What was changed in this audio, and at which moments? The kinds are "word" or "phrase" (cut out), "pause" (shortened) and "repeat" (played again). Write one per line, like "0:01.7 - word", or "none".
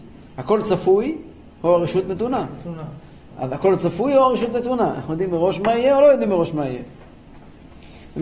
none